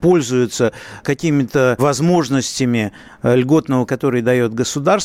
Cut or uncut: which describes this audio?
cut